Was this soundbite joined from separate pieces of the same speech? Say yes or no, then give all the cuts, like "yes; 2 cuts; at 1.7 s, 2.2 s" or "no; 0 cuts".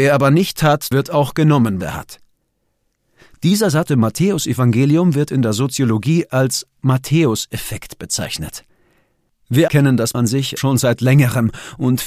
yes; 6 cuts; at 0.9 s, 1.8 s, 3.9 s, 9.7 s, 10.1 s, 10.6 s